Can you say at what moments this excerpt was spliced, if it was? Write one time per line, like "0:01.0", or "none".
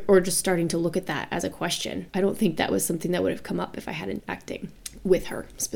0:02.1
0:04.2